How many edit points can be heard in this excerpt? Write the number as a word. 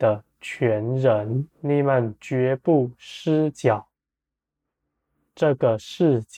one